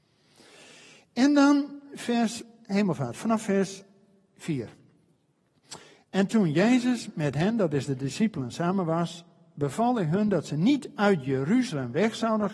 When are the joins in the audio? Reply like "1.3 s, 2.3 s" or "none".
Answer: none